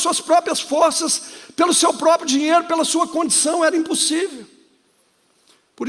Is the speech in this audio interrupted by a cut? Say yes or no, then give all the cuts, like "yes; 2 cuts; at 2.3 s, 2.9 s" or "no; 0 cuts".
no; 0 cuts